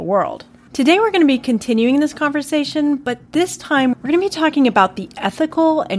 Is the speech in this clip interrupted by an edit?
yes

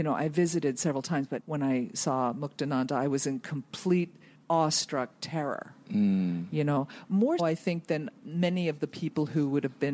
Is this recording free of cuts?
no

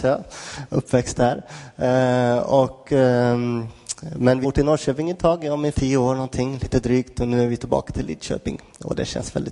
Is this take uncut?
no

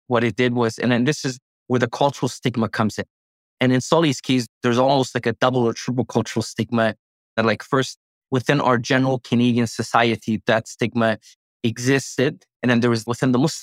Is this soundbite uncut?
yes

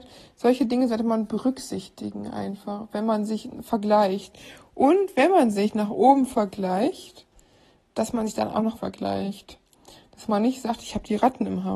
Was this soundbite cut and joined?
yes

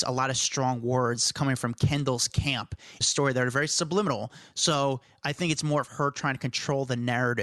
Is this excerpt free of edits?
no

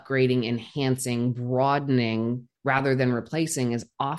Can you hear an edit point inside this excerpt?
yes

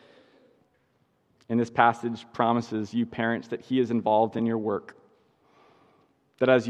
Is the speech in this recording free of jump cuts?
yes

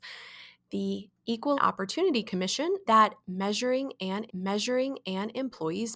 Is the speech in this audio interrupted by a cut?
yes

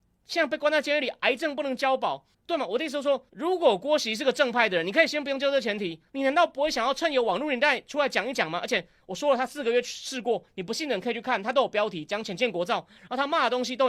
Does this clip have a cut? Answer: yes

